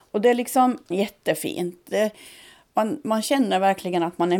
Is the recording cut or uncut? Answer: cut